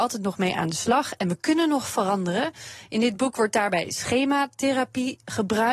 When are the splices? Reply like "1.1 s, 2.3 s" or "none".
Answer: none